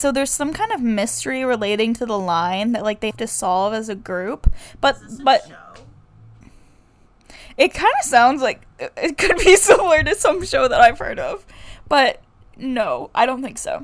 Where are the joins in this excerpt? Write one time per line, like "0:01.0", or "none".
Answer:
0:03.1